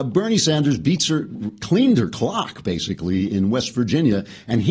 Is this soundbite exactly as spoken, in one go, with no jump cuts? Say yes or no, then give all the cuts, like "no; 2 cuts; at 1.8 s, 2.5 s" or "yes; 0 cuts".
yes; 0 cuts